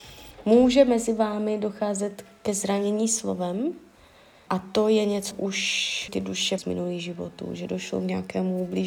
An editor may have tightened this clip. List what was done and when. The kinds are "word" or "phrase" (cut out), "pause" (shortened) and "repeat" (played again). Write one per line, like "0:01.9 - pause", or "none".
0:04.5 - word
0:05.3 - word
0:06.1 - word
0:06.6 - word